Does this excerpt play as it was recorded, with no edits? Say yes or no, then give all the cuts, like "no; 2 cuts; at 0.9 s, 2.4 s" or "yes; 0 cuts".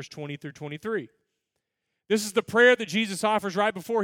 yes; 0 cuts